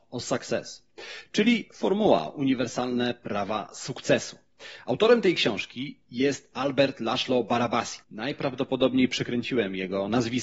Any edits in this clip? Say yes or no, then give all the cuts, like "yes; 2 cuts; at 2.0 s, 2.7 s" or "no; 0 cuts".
yes; 1 cut; at 8.0 s